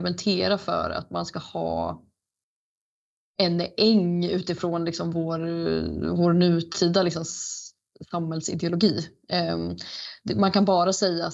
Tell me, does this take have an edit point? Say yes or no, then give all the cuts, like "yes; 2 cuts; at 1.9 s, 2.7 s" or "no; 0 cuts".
no; 0 cuts